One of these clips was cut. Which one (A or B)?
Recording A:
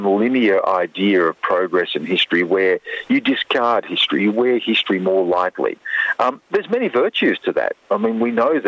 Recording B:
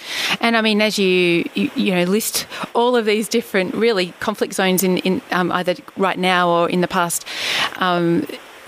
A